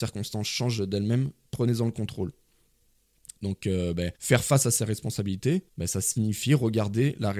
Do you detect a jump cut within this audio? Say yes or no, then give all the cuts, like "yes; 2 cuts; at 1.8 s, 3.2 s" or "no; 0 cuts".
yes; 2 cuts; at 4.1 s, 5.7 s